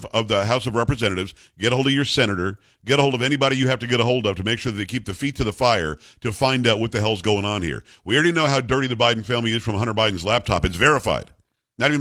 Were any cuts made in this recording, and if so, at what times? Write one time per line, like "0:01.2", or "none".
none